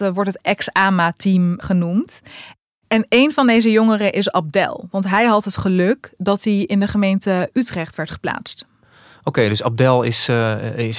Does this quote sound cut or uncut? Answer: uncut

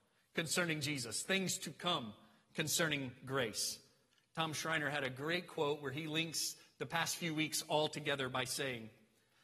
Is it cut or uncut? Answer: uncut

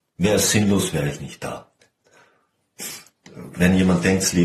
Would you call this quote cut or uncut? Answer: uncut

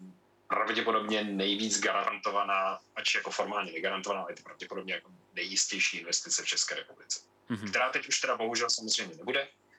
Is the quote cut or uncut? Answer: uncut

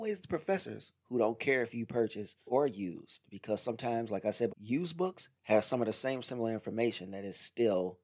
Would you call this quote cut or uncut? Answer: cut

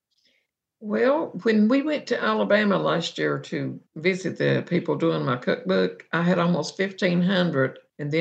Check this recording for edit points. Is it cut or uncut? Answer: uncut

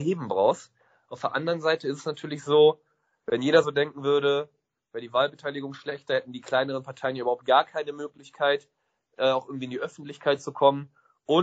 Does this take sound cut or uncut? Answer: uncut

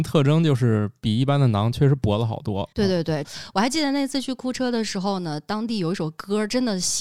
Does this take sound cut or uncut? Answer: cut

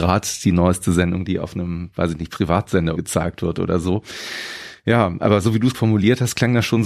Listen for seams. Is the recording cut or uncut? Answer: cut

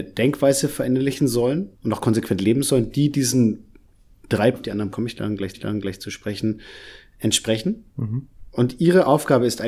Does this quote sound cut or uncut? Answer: cut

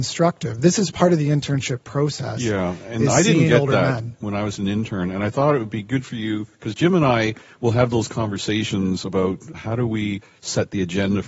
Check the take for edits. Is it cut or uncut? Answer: cut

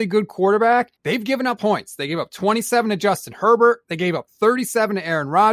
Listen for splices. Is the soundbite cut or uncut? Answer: cut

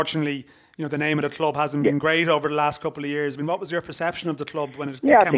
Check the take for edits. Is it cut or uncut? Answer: uncut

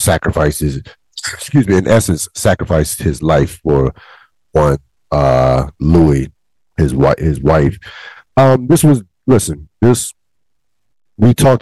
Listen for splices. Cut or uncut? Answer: uncut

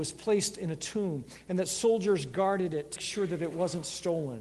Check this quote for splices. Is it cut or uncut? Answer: cut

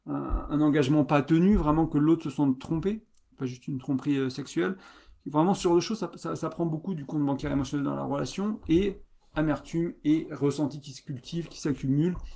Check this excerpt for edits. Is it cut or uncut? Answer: uncut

